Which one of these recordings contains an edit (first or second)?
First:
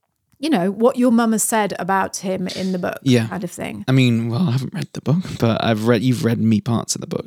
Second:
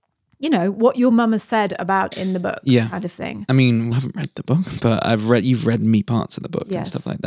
second